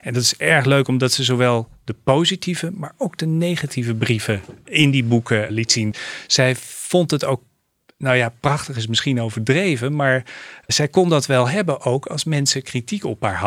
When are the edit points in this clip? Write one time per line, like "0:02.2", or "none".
0:10.7